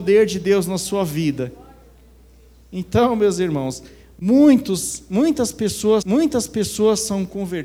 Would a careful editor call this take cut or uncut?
cut